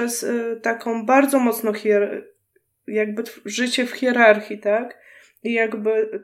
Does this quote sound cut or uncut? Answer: uncut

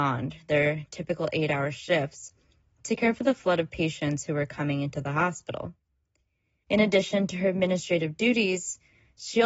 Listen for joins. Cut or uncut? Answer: uncut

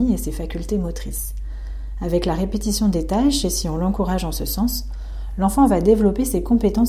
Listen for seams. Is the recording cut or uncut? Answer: uncut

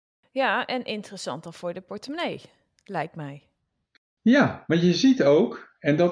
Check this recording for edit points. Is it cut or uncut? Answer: uncut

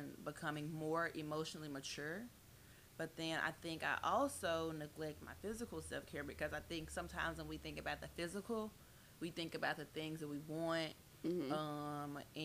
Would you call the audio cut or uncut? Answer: uncut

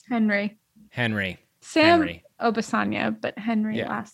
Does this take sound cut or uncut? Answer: uncut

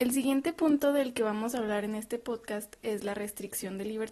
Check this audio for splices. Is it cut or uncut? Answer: uncut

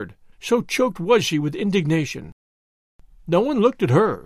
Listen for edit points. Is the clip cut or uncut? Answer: uncut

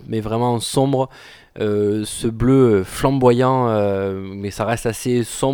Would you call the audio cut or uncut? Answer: uncut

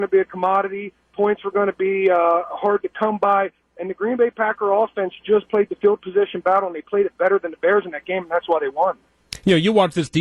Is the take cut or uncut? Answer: uncut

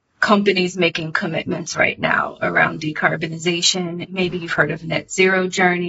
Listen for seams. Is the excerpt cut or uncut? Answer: uncut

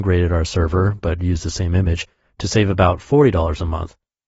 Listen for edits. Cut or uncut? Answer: uncut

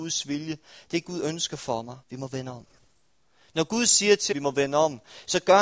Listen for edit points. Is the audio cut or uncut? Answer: cut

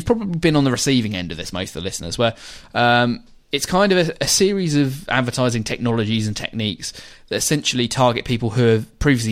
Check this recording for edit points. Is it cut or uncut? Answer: uncut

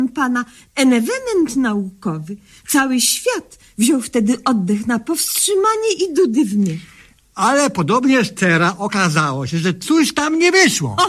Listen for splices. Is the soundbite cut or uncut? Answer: uncut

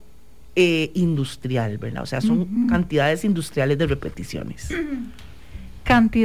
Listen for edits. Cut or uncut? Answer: uncut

